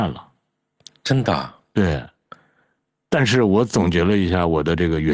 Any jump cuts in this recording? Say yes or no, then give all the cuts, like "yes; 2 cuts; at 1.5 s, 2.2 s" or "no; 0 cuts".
no; 0 cuts